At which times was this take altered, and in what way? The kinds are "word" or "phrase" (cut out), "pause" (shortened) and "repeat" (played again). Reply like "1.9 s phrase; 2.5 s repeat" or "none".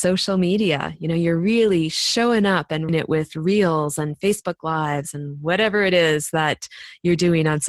2.9 s word